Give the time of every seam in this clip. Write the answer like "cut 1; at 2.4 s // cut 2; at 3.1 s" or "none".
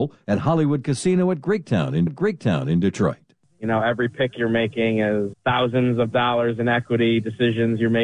cut 1; at 2.1 s // cut 2; at 5.3 s